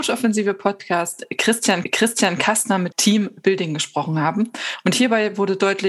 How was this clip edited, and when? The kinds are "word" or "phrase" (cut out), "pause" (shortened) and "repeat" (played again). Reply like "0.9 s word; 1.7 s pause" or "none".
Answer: 1.8 s repeat; 2.9 s phrase